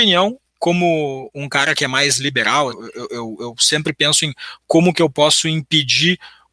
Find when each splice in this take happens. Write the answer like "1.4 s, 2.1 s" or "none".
2.7 s